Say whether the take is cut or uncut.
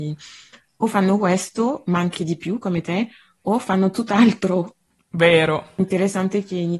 uncut